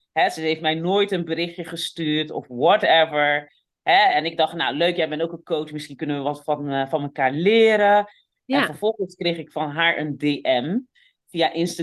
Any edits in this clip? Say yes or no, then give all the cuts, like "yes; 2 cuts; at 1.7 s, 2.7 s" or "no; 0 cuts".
no; 0 cuts